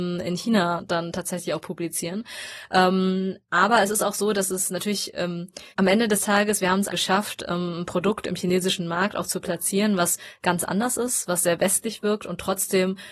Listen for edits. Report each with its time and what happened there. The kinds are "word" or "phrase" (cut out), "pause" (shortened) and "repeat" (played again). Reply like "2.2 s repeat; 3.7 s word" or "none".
5.7 s pause; 6.9 s word